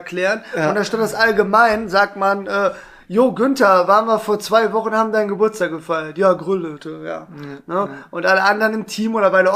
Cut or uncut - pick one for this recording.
uncut